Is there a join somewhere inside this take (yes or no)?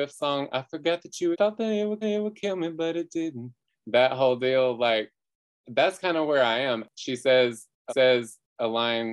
yes